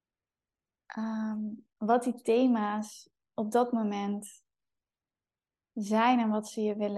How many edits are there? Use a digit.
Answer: 1